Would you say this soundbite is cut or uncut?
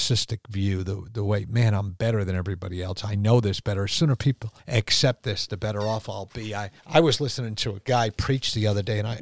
cut